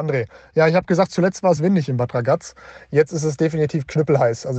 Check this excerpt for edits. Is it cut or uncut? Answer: uncut